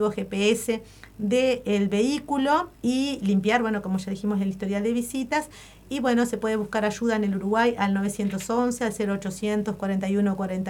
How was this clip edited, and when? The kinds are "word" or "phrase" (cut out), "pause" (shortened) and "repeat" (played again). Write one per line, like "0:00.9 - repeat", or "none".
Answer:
0:02.7 - pause

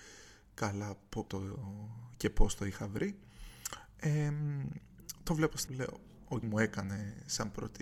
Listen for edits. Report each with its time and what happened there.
0:01.3 - word
0:05.7 - phrase
0:06.4 - word

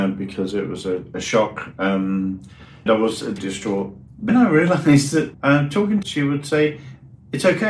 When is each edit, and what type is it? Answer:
0:02.9 - word
0:03.4 - word
0:04.3 - word
0:05.3 - word
0:06.0 - word

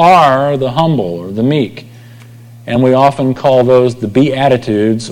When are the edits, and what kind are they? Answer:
none

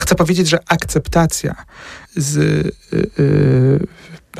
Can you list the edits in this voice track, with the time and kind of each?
0:02.1 - word

